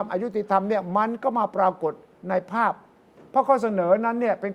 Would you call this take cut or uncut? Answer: uncut